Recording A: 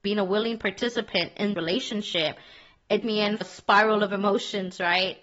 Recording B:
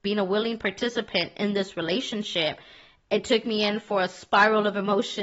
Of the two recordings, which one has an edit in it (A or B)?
A